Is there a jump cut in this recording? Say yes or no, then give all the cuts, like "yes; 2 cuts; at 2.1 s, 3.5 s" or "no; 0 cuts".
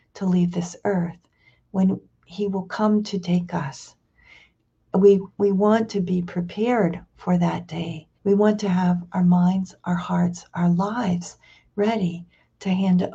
yes; 2 cuts; at 5.3 s, 8.1 s